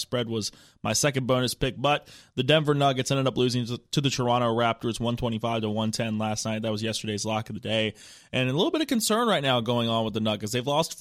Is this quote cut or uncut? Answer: uncut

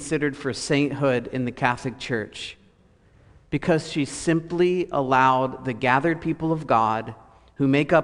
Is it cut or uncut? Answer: uncut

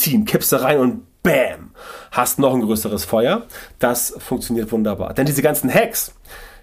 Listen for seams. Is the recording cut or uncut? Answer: uncut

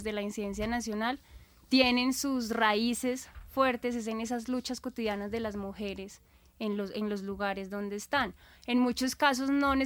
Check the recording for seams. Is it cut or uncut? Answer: uncut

